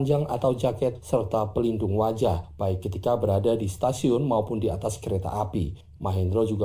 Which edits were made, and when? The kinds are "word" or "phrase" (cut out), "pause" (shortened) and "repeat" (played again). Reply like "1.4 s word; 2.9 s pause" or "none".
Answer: none